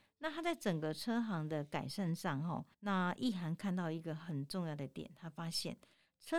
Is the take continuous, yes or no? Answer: no